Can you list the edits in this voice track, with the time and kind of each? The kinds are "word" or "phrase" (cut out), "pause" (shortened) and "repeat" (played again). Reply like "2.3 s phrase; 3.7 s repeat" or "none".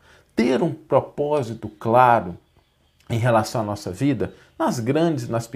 none